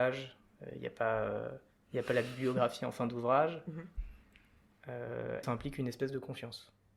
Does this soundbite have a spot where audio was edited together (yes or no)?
yes